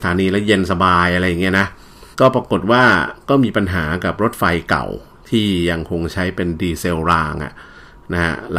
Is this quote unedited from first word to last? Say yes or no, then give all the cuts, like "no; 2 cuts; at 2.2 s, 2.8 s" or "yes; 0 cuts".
no; 1 cut; at 2.1 s